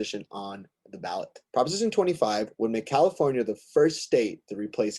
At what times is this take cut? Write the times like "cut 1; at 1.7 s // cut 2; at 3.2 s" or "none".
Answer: cut 1; at 1.5 s